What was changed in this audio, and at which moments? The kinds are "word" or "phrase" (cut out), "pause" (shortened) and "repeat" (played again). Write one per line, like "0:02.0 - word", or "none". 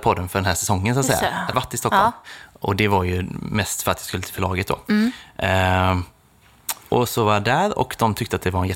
0:01.5 - word